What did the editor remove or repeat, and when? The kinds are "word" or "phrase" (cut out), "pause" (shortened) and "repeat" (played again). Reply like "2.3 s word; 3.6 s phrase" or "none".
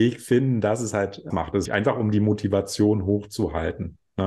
1.3 s word; 1.6 s phrase